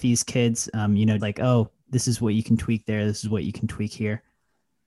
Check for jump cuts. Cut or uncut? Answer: cut